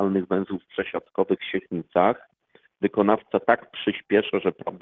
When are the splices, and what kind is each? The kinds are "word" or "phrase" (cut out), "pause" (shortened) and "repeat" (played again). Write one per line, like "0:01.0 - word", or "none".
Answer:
0:01.4 - phrase